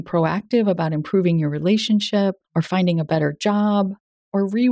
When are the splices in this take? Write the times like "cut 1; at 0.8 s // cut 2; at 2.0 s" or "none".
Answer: cut 1; at 2.4 s